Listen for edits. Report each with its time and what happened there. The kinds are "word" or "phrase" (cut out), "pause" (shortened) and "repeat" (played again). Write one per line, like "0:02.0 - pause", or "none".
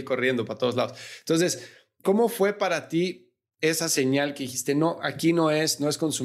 none